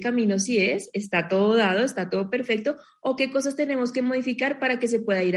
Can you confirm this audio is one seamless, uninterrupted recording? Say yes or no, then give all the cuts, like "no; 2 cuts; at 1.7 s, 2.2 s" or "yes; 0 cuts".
yes; 0 cuts